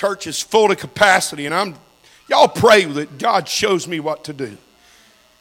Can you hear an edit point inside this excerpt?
no; 0 cuts

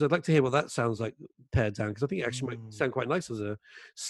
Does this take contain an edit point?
no; 0 cuts

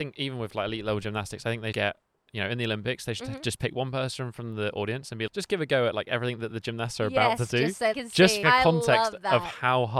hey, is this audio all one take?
no; 4 cuts; at 1.7 s, 5.3 s, 7.9 s, 8.4 s

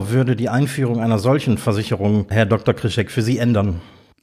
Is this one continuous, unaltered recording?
yes; 0 cuts

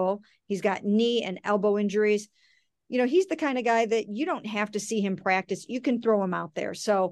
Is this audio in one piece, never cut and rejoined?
yes; 0 cuts

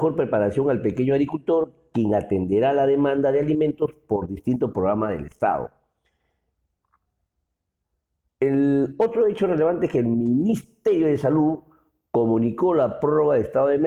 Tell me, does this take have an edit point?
no; 0 cuts

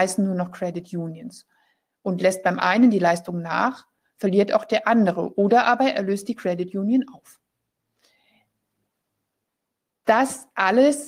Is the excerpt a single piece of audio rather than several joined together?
yes; 0 cuts

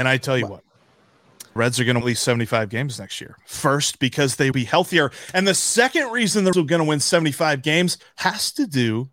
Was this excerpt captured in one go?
no; 5 cuts; at 1.6 s, 2.0 s, 4.5 s, 6.5 s, 8.0 s

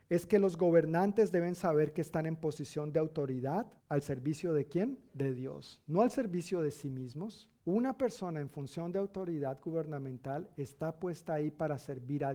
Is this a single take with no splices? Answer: no; 3 cuts; at 3.8 s, 5.1 s, 7.6 s

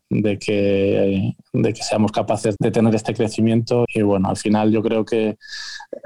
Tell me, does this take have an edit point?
yes; 2 cuts; at 2.6 s, 3.8 s

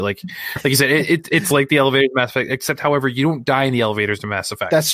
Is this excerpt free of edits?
yes; 0 cuts

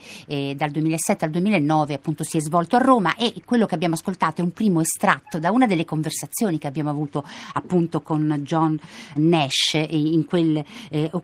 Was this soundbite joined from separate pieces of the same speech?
yes; 1 cut; at 9.2 s

